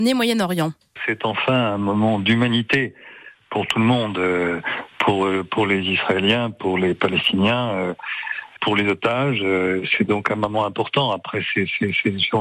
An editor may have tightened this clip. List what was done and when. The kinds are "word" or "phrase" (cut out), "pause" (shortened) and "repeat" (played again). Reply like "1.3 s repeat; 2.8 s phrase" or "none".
8.6 s word

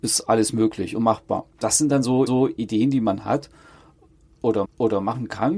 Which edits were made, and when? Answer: 1.5 s pause; 2.3 s repeat; 4.6 s repeat

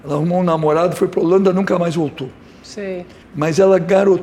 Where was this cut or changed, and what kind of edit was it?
3.2 s pause

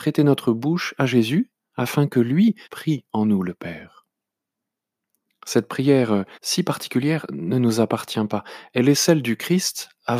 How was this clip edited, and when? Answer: 2.6 s pause; 6.3 s pause

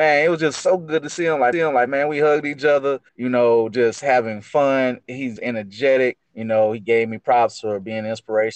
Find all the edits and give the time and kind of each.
1.5 s repeat; 3.1 s pause; 5.4 s word; 6.2 s pause

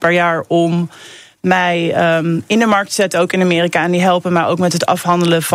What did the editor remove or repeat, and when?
none

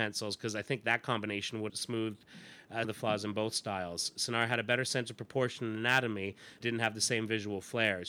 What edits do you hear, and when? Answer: 1.7 s word; 2.8 s word; 6.6 s word

